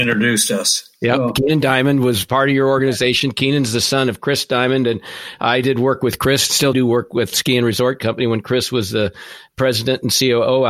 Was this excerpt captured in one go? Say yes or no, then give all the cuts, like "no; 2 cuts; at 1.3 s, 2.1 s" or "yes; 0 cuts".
no; 2 cuts; at 6.7 s, 7.3 s